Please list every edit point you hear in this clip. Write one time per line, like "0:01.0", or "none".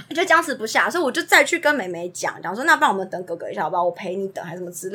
none